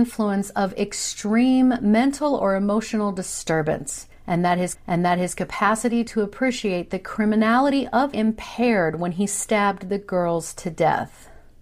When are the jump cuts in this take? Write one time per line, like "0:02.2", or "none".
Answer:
0:04.7
0:08.1